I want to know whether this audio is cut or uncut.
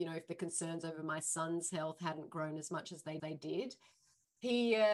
cut